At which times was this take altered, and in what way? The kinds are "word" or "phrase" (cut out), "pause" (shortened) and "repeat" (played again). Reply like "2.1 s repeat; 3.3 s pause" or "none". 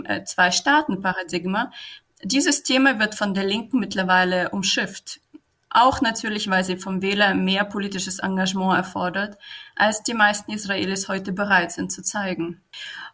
none